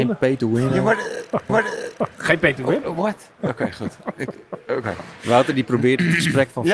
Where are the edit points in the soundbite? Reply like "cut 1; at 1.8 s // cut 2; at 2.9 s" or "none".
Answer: cut 1; at 1.5 s // cut 2; at 3.3 s